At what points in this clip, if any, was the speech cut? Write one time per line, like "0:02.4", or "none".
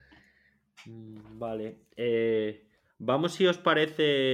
none